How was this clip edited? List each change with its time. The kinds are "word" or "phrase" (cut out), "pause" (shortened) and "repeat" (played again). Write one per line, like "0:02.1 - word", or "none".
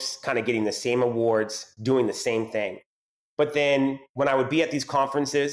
none